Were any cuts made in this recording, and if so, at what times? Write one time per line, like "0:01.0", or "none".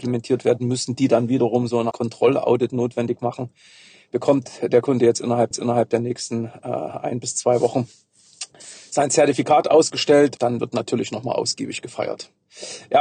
0:01.9
0:05.5
0:10.4